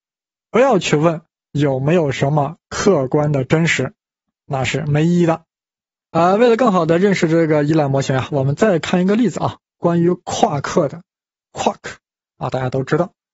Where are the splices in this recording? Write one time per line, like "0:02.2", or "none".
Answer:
none

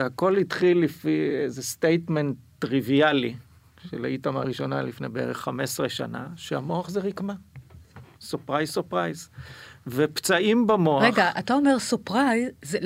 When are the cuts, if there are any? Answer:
0:04.4

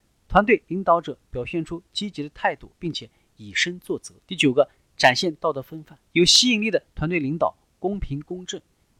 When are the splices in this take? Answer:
0:04.2
0:06.1

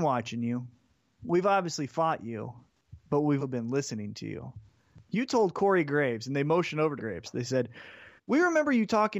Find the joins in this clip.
0:03.4
0:07.0
0:08.2

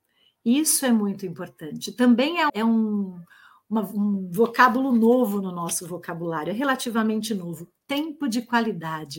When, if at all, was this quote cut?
0:02.5

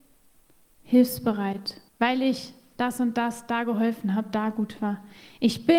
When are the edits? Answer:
0:01.9

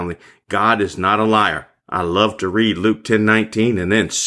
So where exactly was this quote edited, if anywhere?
none

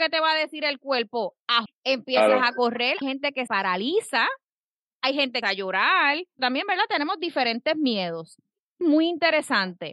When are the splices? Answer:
0:01.7
0:03.0
0:03.5
0:05.4
0:06.4
0:08.8

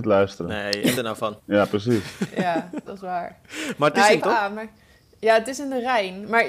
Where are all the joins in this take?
0:01.0
0:01.4
0:02.9
0:04.2

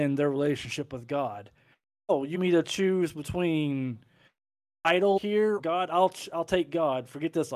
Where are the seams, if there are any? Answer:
0:02.3
0:04.7
0:05.2
0:05.6

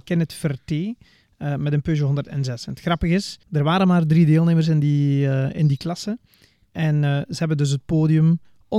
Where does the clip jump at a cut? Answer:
0:03.4

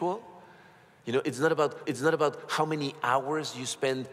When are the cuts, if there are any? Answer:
0:01.8

